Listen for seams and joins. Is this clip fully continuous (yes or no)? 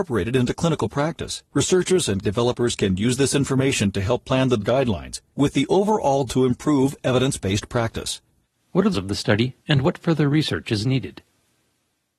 no